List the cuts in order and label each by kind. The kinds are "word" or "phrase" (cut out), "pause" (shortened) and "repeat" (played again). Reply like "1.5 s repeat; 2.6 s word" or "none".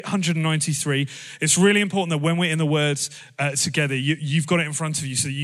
none